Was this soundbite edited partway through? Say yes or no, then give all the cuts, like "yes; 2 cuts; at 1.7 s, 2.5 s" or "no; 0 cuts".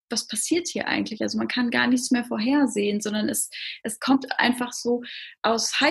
no; 0 cuts